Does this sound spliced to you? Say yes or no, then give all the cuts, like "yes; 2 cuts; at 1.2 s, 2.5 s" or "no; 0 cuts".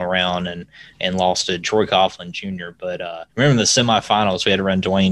yes; 1 cut; at 3.3 s